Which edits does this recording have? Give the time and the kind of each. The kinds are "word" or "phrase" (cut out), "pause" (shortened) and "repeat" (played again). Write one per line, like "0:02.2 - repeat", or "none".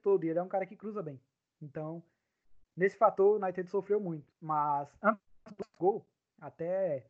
0:04.3 - pause